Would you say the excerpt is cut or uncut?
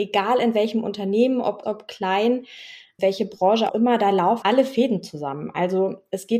cut